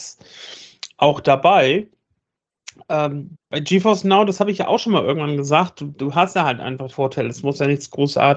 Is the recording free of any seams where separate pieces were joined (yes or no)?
no